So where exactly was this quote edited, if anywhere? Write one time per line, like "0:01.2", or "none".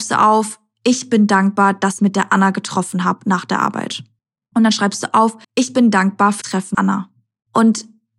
0:02.0
0:05.4
0:06.4
0:06.7